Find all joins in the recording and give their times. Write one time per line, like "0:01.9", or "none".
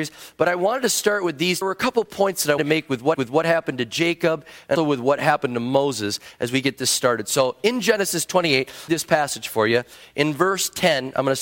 0:01.6
0:02.6
0:03.1
0:04.8
0:08.9